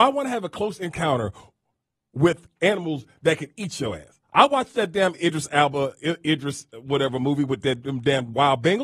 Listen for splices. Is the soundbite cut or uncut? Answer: uncut